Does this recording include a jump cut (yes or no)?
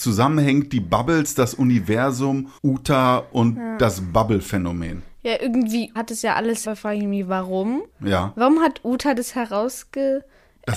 yes